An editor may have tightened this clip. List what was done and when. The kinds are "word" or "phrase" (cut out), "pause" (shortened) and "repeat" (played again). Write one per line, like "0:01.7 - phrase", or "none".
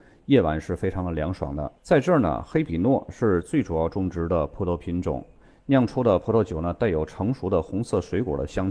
0:01.8 - pause